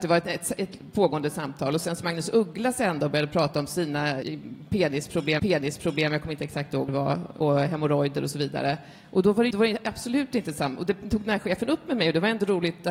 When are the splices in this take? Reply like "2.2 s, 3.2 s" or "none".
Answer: 2.0 s, 4.2 s, 5.4 s, 6.9 s, 7.4 s, 9.5 s